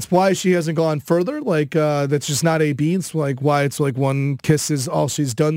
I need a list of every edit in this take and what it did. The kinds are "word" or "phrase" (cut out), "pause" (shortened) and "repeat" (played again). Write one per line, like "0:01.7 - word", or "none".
none